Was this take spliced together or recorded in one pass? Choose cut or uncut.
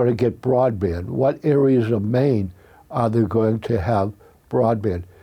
uncut